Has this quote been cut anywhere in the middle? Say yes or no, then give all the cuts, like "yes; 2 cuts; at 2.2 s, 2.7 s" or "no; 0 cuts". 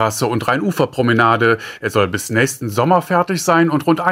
no; 0 cuts